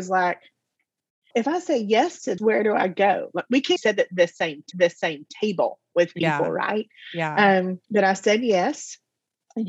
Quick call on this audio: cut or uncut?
cut